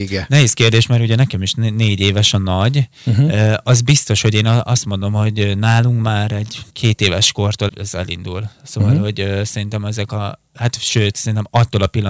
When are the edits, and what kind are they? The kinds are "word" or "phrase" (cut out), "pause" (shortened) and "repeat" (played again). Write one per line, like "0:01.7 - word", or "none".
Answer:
0:06.7 - pause
0:07.7 - word